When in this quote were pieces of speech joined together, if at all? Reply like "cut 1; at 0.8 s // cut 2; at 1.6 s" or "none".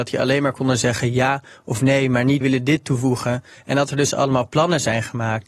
cut 1; at 2.4 s